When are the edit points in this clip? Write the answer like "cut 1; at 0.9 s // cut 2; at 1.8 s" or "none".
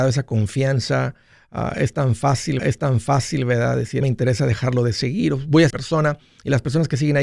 cut 1; at 2.6 s // cut 2; at 4.0 s // cut 3; at 5.7 s